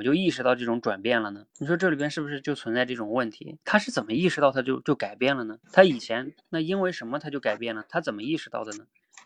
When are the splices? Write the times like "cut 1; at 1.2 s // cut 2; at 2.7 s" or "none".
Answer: cut 1; at 1.5 s // cut 2; at 5.6 s